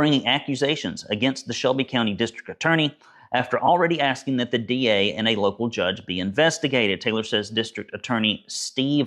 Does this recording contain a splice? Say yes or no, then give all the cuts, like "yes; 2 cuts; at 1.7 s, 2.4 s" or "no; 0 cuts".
no; 0 cuts